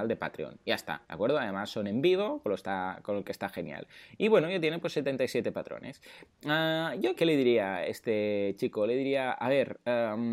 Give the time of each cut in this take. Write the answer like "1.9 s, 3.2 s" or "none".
1.0 s, 7.2 s